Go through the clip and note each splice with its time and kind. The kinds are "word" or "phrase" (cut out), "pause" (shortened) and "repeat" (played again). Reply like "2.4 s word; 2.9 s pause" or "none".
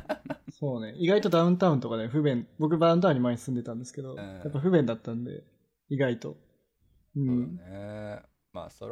none